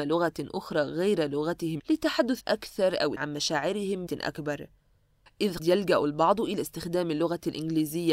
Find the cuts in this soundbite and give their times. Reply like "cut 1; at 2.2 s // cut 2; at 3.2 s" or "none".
cut 1; at 1.8 s // cut 2; at 2.4 s // cut 3; at 3.2 s // cut 4; at 4.1 s // cut 5; at 5.6 s